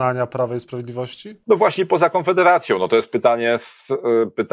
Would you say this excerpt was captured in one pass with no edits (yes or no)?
no